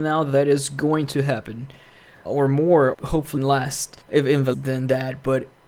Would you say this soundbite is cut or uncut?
cut